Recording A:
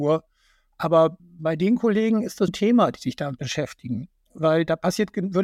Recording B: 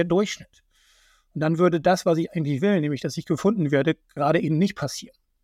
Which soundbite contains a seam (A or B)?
A